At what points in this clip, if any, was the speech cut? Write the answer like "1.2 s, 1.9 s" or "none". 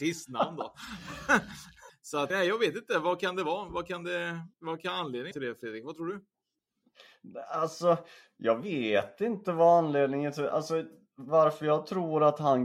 1.9 s, 2.3 s, 4.5 s, 5.3 s